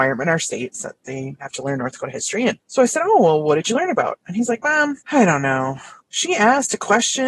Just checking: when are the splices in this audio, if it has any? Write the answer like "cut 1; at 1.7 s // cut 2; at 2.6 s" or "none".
cut 1; at 5.0 s